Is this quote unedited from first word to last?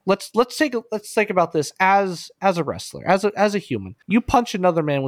no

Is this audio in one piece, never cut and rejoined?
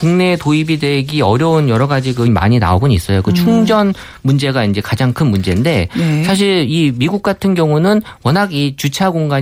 no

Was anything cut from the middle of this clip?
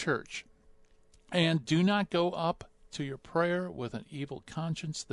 no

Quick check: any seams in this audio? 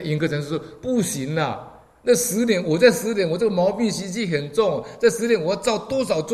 no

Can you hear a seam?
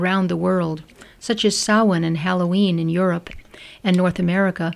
no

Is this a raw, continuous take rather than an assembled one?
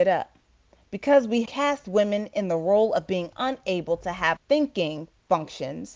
no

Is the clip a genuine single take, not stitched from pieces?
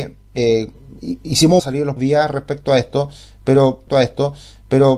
no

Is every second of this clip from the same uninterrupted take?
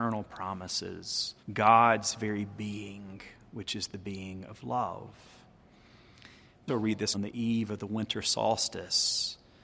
no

